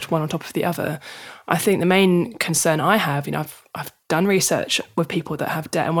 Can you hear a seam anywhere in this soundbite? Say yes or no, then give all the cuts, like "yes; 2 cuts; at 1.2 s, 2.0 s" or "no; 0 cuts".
yes; 1 cut; at 4.0 s